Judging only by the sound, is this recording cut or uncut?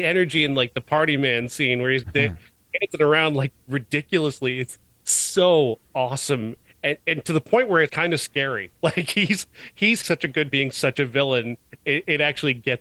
cut